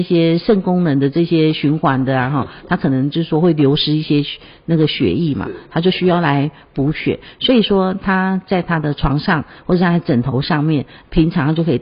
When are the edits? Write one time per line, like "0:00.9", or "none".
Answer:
none